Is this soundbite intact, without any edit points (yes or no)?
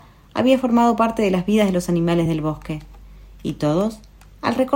yes